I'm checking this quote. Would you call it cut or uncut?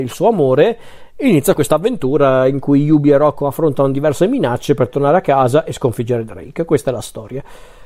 cut